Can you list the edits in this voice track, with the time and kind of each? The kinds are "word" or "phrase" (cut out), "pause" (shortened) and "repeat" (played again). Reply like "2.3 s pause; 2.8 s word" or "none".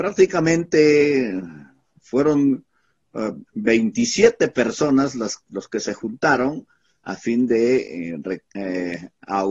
3.5 s pause